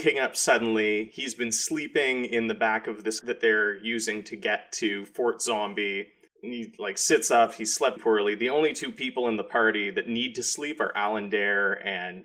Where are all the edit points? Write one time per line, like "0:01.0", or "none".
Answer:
0:03.2
0:06.3
0:08.0